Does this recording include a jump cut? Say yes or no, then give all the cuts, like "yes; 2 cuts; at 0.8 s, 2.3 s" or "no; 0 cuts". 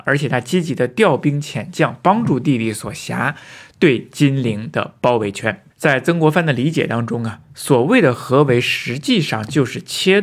yes; 1 cut; at 5.7 s